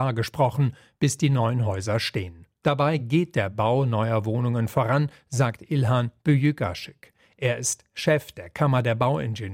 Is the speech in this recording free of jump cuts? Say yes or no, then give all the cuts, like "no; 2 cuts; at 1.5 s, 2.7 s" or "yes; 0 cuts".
yes; 0 cuts